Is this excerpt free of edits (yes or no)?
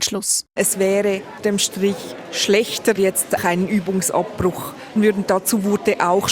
no